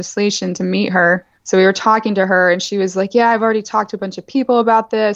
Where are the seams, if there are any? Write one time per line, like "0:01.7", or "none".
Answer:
0:01.3